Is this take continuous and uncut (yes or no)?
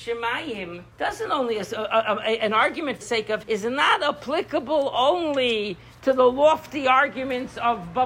no